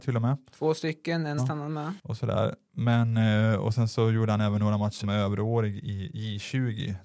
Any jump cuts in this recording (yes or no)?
yes